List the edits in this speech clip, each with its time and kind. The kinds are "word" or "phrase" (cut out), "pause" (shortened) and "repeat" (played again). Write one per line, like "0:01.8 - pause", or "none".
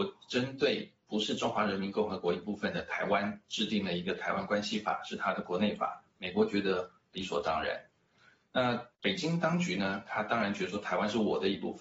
0:08.9 - pause